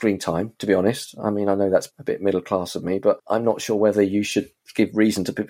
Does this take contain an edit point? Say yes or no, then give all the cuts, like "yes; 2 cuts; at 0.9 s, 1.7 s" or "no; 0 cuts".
yes; 1 cut; at 1.9 s